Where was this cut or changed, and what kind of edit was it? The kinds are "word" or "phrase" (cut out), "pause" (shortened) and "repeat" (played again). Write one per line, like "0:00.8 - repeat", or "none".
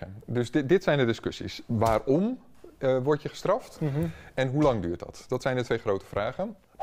none